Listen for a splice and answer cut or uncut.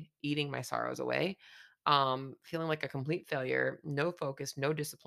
uncut